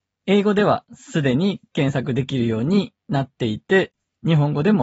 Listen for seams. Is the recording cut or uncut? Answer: uncut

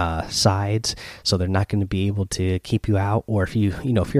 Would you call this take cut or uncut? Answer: uncut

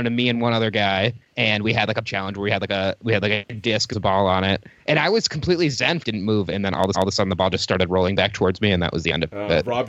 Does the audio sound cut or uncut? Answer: cut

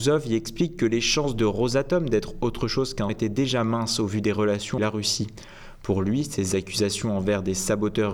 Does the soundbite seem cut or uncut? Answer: cut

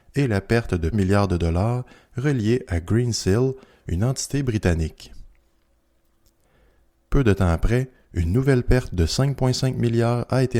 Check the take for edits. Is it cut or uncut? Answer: cut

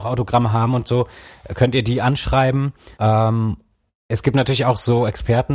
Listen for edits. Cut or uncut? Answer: cut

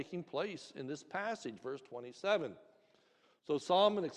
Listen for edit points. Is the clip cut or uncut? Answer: uncut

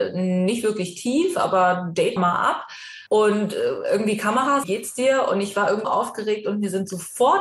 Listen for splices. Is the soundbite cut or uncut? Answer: cut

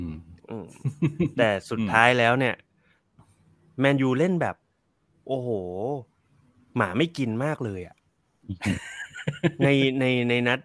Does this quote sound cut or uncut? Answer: uncut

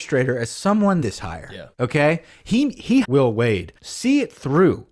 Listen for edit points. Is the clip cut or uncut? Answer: cut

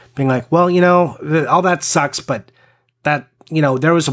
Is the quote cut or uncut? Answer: uncut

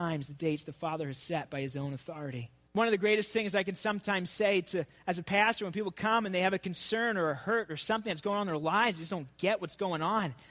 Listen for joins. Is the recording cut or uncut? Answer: cut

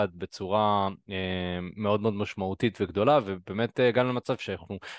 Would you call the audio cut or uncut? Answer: uncut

